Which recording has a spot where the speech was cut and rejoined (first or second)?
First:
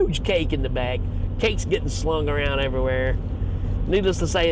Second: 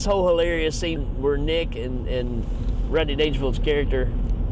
second